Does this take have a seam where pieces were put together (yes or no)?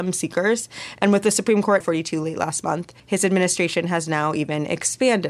yes